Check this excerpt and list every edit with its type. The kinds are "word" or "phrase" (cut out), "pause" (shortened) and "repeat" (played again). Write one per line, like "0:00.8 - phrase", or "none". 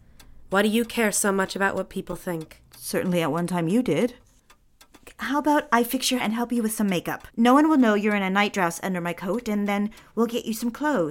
0:02.7 - pause
0:06.2 - word
0:07.3 - pause